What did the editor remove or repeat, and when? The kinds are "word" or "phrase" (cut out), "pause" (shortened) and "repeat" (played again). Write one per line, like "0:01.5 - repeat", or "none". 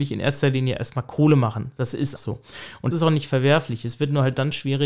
0:02.2 - word
0:02.9 - word